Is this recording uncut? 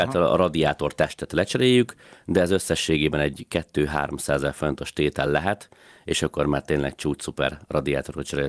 yes; 0 cuts

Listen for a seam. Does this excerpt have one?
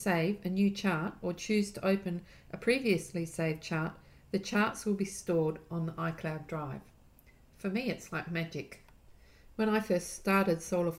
no; 0 cuts

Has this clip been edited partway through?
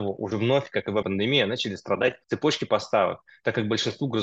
yes; 2 cuts; at 1.0 s, 2.2 s

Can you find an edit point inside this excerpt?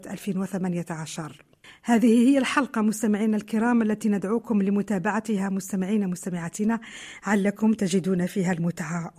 no; 0 cuts

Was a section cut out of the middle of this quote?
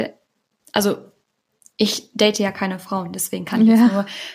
no; 0 cuts

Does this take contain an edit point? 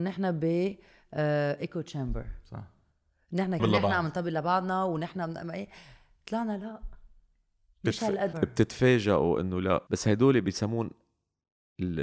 yes; 3 cuts; at 3.6 s, 8.3 s, 9.9 s

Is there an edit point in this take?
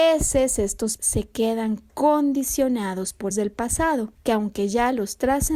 yes; 3 cuts; at 1.0 s, 3.3 s, 4.1 s

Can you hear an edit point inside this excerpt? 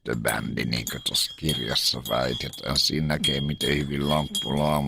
no; 0 cuts

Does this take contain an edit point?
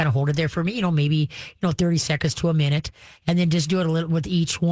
no; 0 cuts

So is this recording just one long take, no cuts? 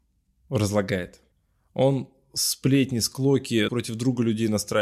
no; 2 cuts; at 1.3 s, 3.7 s

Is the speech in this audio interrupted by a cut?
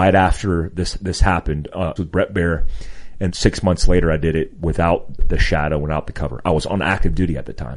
yes; 3 cuts; at 2.0 s, 3.3 s, 5.2 s

